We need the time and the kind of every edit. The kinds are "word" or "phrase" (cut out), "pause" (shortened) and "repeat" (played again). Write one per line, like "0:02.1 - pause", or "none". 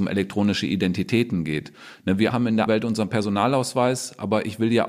0:02.3 - word
0:02.7 - word